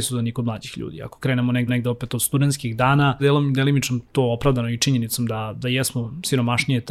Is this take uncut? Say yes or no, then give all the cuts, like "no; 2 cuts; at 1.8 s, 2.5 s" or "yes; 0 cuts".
no; 3 cuts; at 1.7 s, 3.2 s, 4.1 s